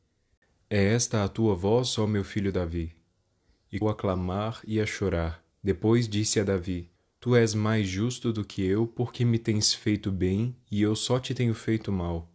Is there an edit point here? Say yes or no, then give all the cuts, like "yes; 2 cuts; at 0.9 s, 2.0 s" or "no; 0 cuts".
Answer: yes; 3 cuts; at 3.8 s, 5.5 s, 7.0 s